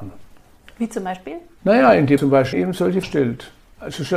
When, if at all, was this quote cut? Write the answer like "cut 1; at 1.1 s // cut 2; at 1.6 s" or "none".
cut 1; at 2.2 s // cut 2; at 2.5 s // cut 3; at 3.0 s